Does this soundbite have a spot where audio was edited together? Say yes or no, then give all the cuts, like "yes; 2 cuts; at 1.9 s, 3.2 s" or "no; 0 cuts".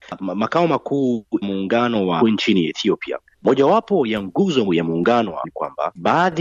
yes; 5 cuts; at 1.4 s, 2.2 s, 3.3 s, 4.7 s, 5.4 s